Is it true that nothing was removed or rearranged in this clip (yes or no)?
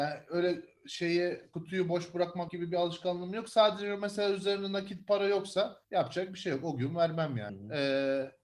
no